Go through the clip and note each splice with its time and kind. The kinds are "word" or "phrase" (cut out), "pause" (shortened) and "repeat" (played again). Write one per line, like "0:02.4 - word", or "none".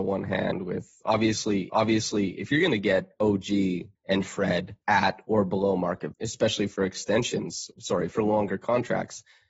0:01.7 - repeat
0:03.9 - pause
0:04.8 - pause
0:06.1 - word
0:07.7 - word